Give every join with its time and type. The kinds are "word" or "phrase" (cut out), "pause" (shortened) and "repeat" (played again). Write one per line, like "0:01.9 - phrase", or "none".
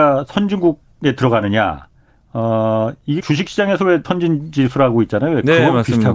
0:02.1 - pause
0:03.2 - word
0:04.0 - word